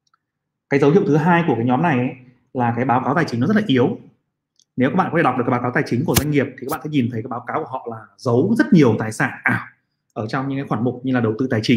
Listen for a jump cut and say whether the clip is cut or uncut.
uncut